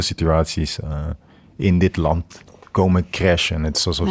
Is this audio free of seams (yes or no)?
yes